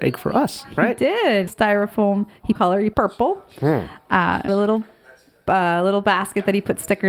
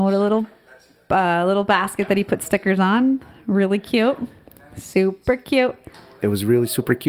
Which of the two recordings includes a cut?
first; 4 cuts; at 1.5 s, 2.5 s, 2.9 s, 4.5 s

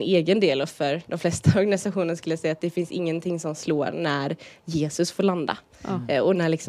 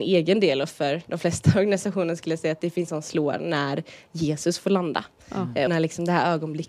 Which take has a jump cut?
second; 2 cuts; at 2.9 s, 5.7 s

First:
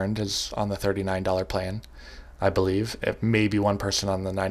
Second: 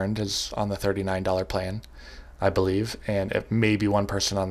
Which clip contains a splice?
first; 1 cut; at 3.0 s

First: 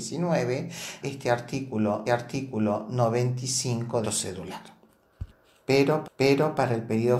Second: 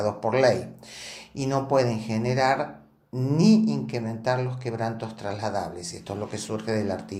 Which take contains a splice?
first; 4 cuts; at 1.0 s, 2.1 s, 4.0 s, 6.0 s

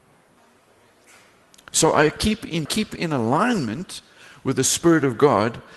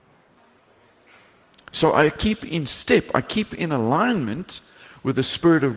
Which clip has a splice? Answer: first; 1 cut; at 2.7 s

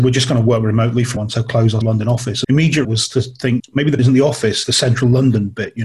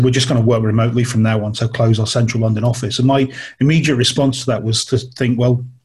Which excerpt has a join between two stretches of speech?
first; 7 cuts; at 1.2 s, 1.8 s, 2.4 s, 2.8 s, 3.6 s, 4.0 s, 4.6 s

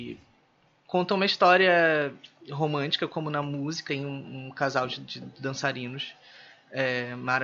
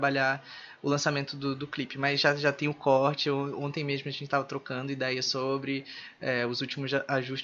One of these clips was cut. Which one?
first; 1 cut; at 3.9 s

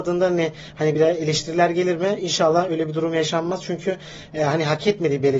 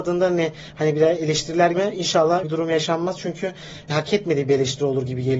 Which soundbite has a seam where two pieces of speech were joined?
second; 3 cuts; at 1.7 s, 2.4 s, 3.9 s

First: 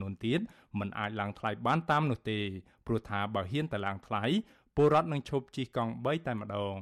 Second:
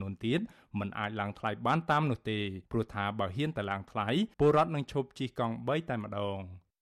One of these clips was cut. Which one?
second; 2 cuts; at 2.6 s, 4.3 s

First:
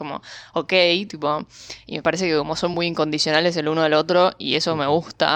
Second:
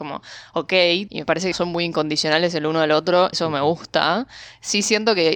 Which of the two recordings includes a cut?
second; 3 cuts; at 1.1 s, 1.5 s, 3.3 s

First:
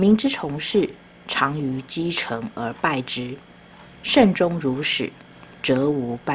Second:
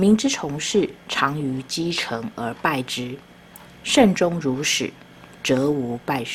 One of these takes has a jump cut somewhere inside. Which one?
second; 1 cut; at 1.0 s

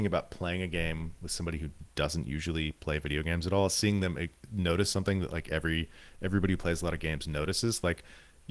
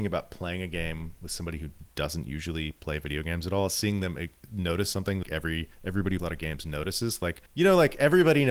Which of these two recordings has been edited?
second; 4 cuts; at 5.2 s, 5.7 s, 6.2 s, 7.5 s

